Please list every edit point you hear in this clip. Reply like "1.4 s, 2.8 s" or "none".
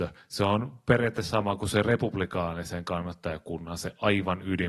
none